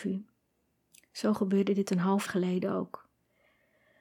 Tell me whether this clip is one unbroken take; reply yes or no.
no